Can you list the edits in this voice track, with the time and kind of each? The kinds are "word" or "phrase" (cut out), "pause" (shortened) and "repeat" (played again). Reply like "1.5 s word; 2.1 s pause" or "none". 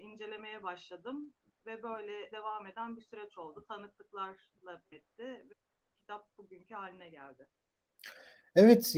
2.3 s word; 4.9 s word